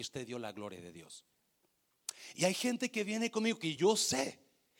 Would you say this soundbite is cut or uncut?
uncut